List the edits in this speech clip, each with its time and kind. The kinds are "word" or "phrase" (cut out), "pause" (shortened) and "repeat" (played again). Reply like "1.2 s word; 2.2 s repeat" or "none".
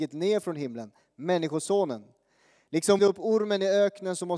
3.0 s phrase

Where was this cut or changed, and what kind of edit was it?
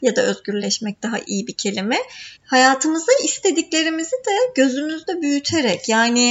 2.4 s pause

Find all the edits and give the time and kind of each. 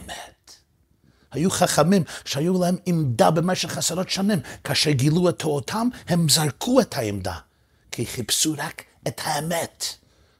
none

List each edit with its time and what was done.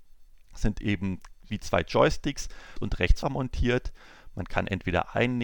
1.5 s phrase; 2.8 s word; 3.2 s phrase

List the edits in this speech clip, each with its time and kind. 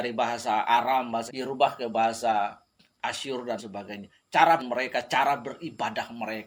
1.3 s word; 3.6 s word; 4.6 s word

